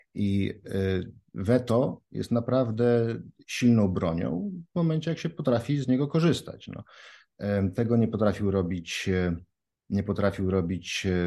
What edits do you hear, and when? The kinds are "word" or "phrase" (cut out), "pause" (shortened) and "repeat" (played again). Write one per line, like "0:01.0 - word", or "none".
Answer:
none